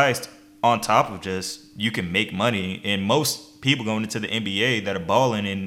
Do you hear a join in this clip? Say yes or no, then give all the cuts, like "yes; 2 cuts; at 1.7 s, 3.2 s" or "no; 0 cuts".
no; 0 cuts